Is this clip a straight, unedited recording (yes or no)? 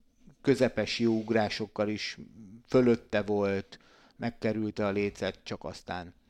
yes